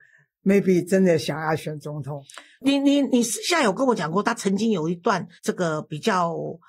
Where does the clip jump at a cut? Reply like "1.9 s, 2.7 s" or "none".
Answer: 5.4 s